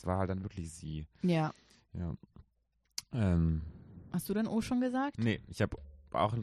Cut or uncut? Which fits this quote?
uncut